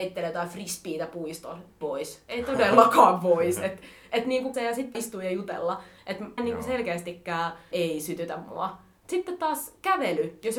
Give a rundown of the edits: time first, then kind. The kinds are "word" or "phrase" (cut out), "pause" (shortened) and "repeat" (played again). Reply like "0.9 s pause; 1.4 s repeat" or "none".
1.8 s word; 4.5 s phrase; 4.9 s word; 6.4 s word; 7.7 s word